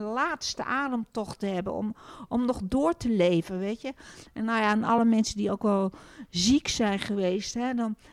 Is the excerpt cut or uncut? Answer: uncut